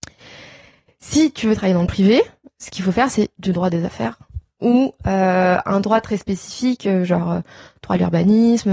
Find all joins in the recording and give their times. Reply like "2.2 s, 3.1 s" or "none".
none

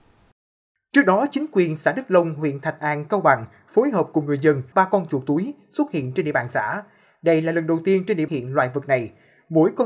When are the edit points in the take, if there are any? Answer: 4.7 s, 8.3 s

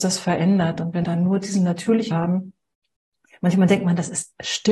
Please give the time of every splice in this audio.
1.0 s, 2.1 s

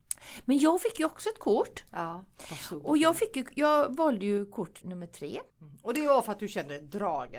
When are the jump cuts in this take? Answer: 1.9 s, 4.8 s, 5.5 s

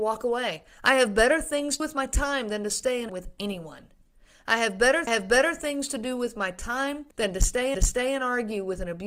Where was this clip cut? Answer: 1.8 s, 3.1 s, 5.1 s, 7.1 s, 7.7 s

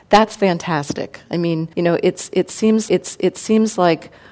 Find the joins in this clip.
1.7 s, 2.9 s

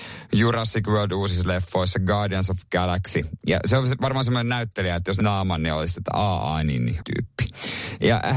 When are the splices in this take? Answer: 5.2 s, 7.0 s

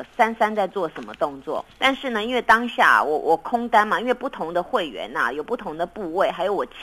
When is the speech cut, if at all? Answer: 1.7 s

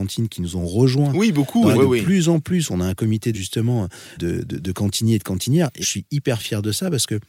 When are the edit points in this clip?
1.7 s, 3.3 s, 4.2 s, 5.8 s

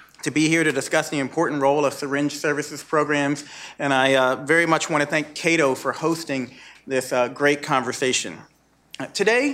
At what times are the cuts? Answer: none

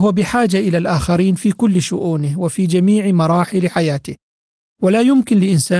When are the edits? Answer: none

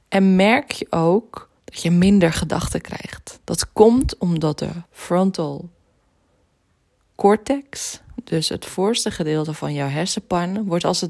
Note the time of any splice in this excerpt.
1.6 s, 4.9 s

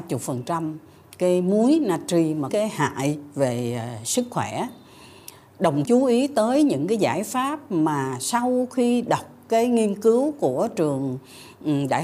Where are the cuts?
2.5 s, 5.8 s

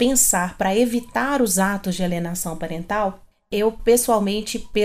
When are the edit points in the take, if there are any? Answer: none

